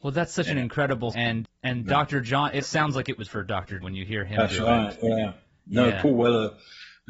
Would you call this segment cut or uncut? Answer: cut